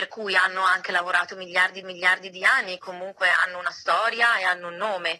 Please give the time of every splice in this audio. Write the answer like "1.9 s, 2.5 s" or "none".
1.8 s, 2.8 s